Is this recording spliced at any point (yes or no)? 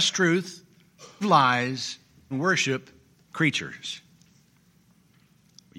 yes